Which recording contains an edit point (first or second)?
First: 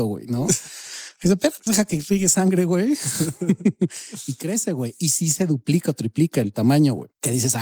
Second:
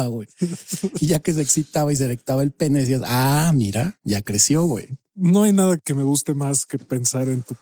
first